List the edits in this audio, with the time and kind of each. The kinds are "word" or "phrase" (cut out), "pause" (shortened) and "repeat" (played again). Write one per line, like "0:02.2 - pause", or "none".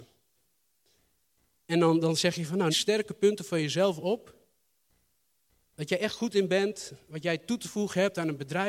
0:02.7 - phrase